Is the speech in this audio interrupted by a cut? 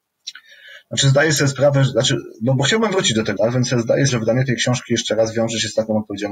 yes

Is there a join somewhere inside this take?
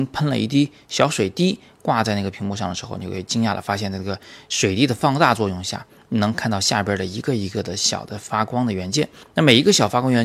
yes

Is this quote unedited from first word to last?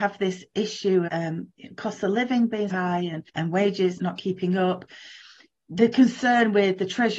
no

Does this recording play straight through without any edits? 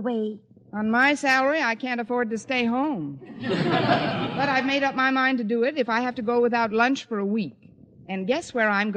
yes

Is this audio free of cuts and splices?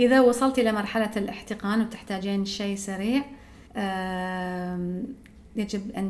no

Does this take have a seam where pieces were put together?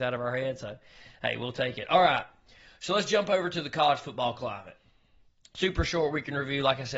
no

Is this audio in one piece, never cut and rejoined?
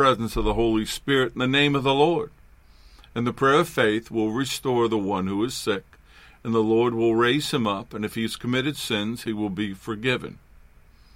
yes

